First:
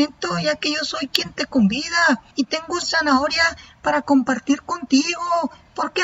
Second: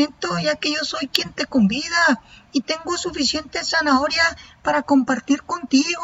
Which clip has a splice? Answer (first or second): first